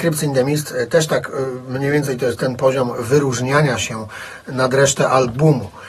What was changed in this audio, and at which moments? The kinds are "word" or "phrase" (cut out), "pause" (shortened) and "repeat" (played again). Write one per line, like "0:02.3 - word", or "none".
none